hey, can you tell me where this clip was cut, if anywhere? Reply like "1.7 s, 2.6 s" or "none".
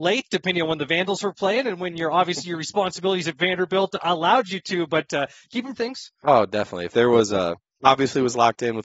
5.7 s